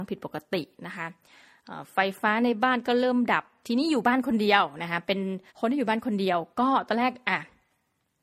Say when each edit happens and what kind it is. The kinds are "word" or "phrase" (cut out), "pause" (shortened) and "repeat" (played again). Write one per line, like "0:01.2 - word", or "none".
0:05.5 - pause